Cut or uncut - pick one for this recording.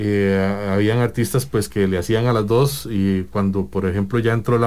uncut